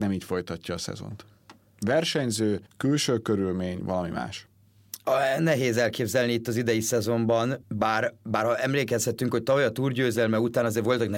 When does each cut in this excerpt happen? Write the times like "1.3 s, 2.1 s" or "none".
2.7 s, 7.6 s